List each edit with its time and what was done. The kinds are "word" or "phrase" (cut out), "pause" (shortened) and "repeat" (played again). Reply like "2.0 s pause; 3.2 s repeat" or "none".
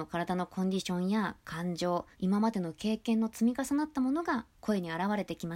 2.1 s pause